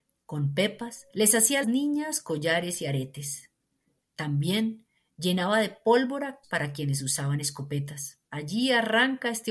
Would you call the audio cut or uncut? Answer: cut